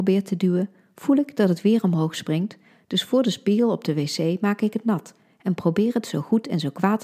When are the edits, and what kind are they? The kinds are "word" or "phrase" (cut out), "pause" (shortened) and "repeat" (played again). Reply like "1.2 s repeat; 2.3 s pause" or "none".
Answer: none